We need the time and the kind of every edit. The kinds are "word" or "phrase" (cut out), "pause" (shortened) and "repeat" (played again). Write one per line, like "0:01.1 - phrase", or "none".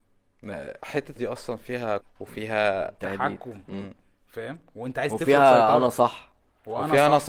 0:01.2 - word
0:02.0 - word
0:03.6 - word